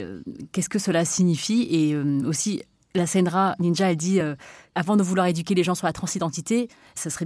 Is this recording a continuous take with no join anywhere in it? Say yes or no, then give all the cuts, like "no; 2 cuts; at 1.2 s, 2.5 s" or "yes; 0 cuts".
yes; 0 cuts